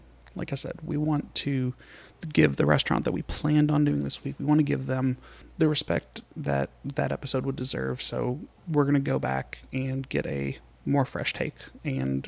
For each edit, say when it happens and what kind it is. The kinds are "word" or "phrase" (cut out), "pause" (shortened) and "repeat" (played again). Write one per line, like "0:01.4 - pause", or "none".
0:08.6 - pause